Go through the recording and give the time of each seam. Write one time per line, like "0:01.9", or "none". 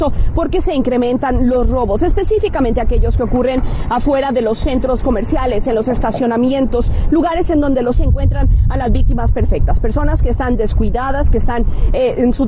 0:07.9